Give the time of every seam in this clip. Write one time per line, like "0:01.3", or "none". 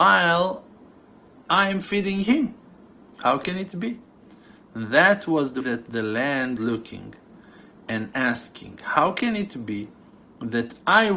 0:05.6
0:06.6